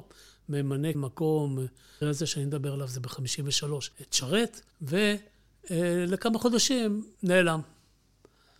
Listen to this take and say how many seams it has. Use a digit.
5